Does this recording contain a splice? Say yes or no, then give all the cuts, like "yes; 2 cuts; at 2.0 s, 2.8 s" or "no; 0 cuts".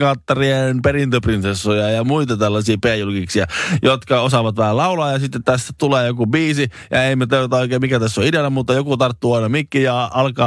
no; 0 cuts